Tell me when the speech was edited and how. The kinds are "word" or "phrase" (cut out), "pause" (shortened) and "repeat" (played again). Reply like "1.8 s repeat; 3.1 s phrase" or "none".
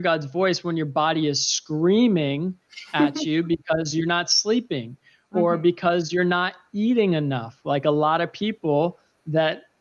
none